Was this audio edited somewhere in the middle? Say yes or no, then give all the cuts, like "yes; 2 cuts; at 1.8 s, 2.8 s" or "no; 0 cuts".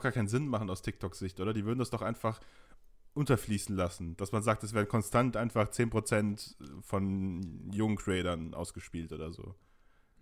no; 0 cuts